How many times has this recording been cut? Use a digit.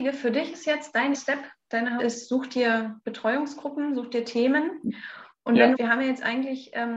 4